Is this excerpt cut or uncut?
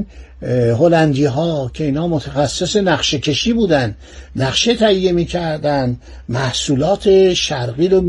uncut